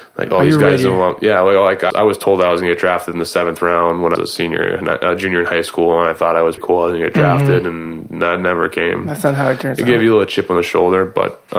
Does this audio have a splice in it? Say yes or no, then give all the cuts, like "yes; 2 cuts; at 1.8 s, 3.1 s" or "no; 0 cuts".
yes; 3 cuts; at 1.9 s, 4.1 s, 6.6 s